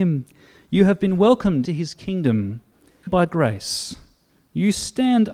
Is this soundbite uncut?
no; 2 cuts; at 1.6 s, 3.1 s

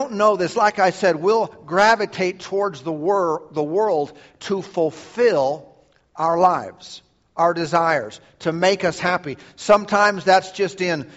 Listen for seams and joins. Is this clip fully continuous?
yes; 0 cuts

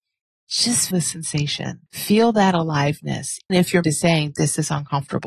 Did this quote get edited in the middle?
yes; 4 cuts; at 0.9 s, 1.9 s, 3.5 s, 3.8 s

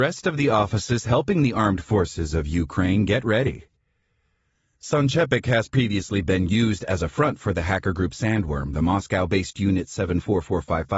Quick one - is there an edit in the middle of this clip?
no; 0 cuts

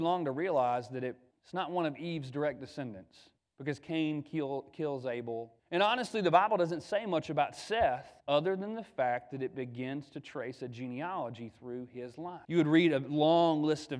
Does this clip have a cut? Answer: yes; 5 cuts; at 1.3 s, 3.4 s, 5.6 s, 8.2 s, 12.4 s

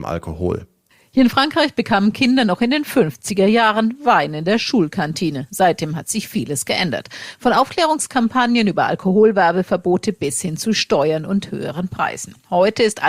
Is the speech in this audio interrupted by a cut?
no; 0 cuts

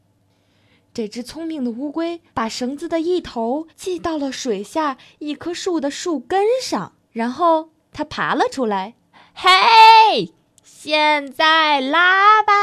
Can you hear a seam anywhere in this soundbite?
yes; 4 cuts; at 2.3 s, 3.7 s, 7.0 s, 9.1 s

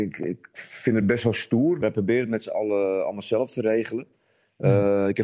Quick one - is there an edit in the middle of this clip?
no; 0 cuts

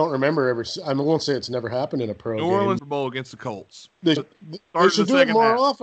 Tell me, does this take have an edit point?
yes; 2 cuts; at 2.8 s, 4.2 s

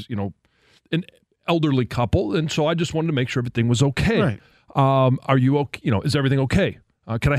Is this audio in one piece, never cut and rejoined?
yes; 0 cuts

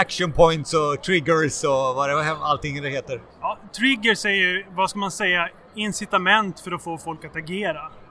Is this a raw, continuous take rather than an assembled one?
no; 1 cut; at 3.3 s

